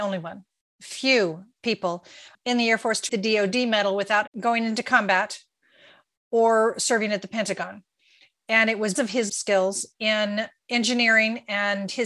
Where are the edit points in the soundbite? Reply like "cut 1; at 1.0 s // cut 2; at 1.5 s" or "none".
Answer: cut 1; at 3.1 s // cut 2; at 4.3 s // cut 3; at 8.9 s // cut 4; at 9.3 s